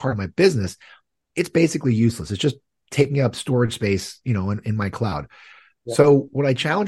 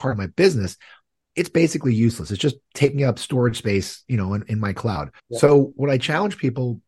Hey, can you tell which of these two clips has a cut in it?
second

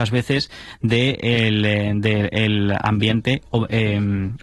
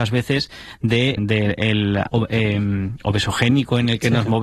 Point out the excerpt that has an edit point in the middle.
second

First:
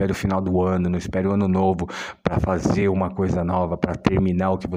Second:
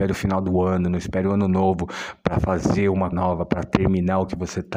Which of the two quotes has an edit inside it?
second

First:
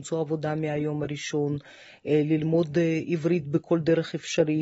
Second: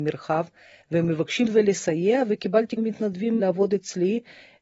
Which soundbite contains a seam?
second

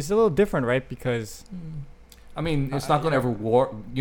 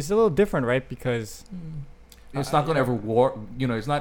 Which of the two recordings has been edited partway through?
second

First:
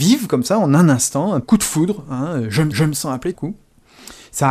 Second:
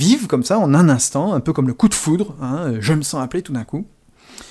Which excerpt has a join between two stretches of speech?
first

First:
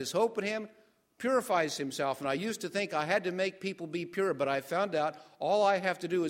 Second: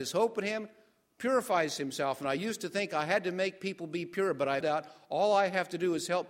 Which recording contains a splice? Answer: second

